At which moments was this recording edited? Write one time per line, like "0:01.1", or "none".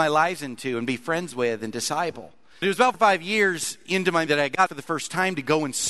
0:02.6
0:02.9
0:04.3
0:04.7